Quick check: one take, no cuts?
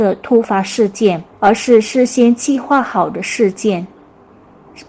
no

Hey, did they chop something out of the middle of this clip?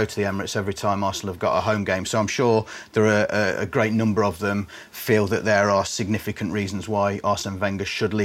no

